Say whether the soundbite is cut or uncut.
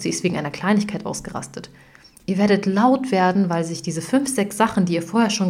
uncut